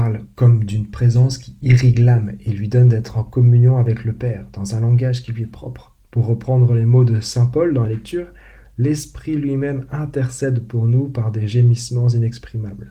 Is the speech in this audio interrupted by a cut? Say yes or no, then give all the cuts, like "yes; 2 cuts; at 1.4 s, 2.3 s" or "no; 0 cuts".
yes; 2 cuts; at 6.0 s, 7.9 s